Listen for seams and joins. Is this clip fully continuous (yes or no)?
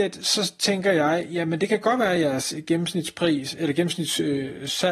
yes